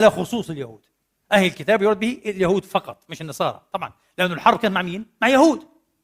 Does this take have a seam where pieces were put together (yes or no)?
no